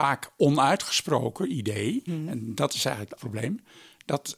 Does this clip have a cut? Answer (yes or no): yes